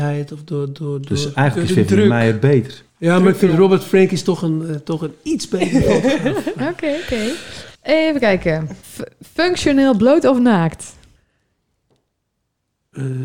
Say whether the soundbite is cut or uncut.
cut